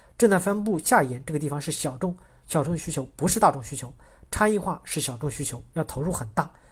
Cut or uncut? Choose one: uncut